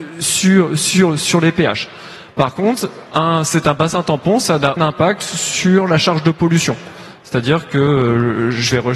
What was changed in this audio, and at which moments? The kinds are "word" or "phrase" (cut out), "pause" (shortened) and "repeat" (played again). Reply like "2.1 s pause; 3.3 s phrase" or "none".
4.8 s word